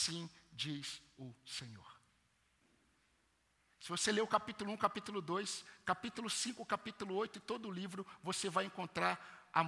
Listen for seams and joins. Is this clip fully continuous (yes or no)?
yes